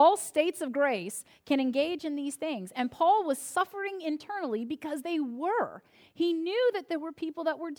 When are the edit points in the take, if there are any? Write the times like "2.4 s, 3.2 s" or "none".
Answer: none

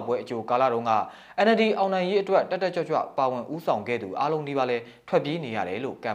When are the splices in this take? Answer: none

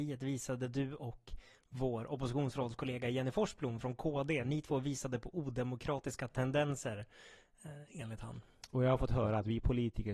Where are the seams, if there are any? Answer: none

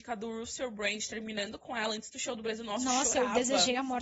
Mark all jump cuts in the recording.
none

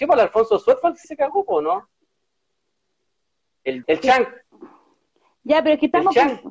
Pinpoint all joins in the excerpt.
1.0 s, 3.8 s

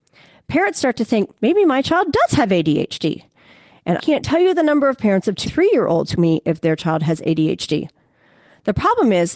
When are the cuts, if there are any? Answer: 1.4 s, 4.0 s, 5.5 s, 6.1 s

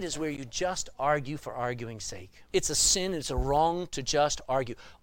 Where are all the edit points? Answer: 2.5 s

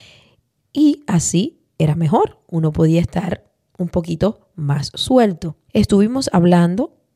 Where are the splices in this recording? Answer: 5.7 s

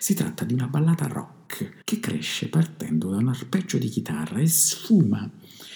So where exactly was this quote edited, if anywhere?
1.8 s

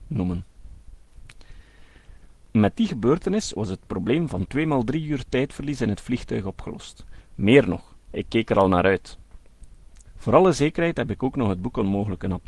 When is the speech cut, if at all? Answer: none

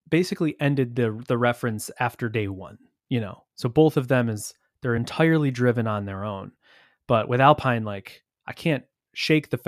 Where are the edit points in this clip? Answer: none

